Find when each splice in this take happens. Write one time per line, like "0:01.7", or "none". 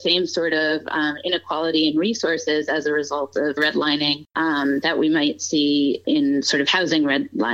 0:03.6
0:04.3
0:06.0